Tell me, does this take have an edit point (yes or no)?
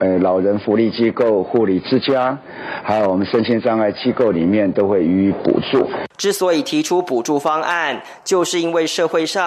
no